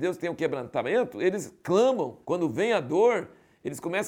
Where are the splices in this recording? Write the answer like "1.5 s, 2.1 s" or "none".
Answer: 2.2 s